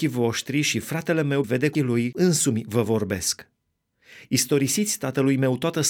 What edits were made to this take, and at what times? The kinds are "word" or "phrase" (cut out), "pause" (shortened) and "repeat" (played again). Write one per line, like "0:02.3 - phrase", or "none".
0:01.4 - word
0:01.7 - word
0:02.1 - word